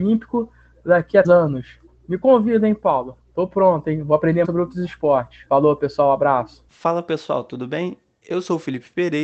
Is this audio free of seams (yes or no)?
no